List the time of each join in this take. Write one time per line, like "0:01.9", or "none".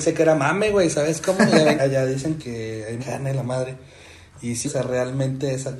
0:01.8
0:02.4
0:03.0
0:04.6